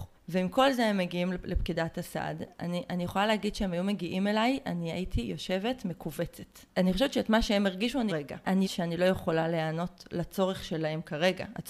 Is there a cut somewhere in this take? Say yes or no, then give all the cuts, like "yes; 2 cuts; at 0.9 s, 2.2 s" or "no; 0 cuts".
yes; 2 cuts; at 8.1 s, 8.6 s